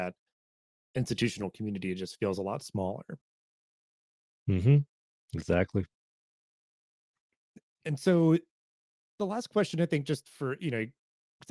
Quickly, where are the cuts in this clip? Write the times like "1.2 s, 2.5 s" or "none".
none